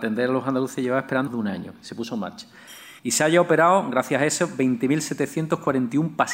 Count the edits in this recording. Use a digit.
2